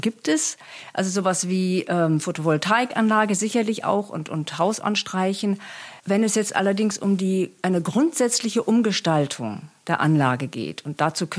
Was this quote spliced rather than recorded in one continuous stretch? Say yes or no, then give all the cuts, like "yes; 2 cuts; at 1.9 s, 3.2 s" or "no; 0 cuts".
yes; 1 cut; at 6.0 s